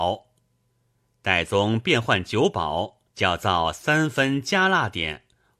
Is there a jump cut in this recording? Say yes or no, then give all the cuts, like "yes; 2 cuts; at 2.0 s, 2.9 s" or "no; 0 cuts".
yes; 1 cut; at 3.1 s